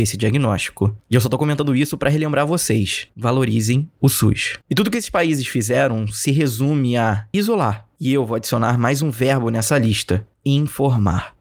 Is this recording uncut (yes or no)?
no